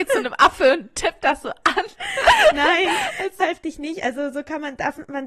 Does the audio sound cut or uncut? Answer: cut